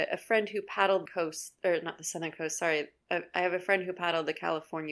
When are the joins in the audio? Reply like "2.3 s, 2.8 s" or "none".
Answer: 1.1 s